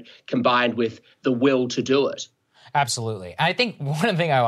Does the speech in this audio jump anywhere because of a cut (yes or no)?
no